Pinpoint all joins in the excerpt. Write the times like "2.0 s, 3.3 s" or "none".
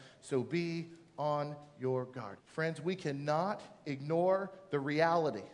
2.4 s